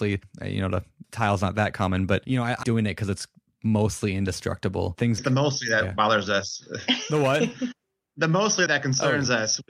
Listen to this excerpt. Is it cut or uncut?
cut